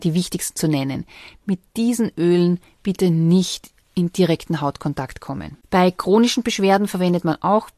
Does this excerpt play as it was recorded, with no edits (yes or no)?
no